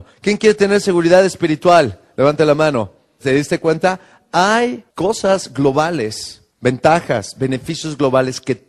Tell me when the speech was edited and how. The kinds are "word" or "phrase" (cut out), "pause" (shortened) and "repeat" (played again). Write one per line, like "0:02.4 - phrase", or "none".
0:04.9 - pause
0:06.5 - pause